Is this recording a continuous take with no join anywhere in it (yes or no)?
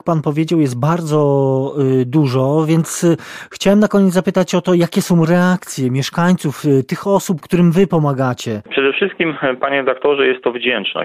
yes